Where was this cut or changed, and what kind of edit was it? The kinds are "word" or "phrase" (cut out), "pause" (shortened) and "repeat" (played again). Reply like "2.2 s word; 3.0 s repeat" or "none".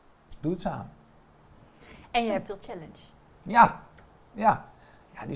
2.5 s phrase